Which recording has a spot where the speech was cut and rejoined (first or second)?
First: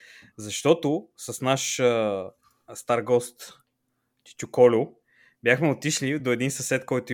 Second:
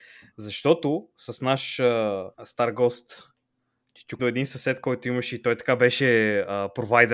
second